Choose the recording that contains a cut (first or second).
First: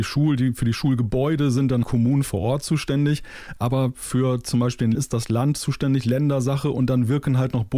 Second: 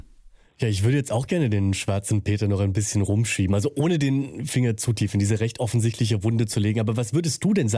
first